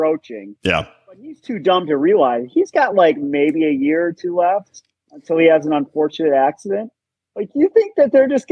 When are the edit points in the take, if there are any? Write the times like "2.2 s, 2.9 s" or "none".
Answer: none